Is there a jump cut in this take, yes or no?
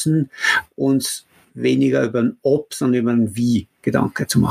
no